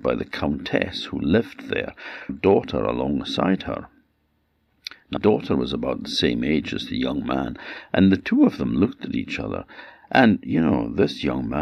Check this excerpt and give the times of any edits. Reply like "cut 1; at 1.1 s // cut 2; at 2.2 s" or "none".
cut 1; at 2.3 s // cut 2; at 5.2 s